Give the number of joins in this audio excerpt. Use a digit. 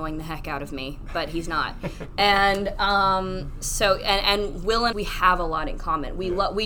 1